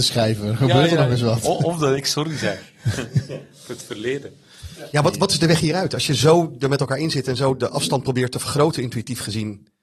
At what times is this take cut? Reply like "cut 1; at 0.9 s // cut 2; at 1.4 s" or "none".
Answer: none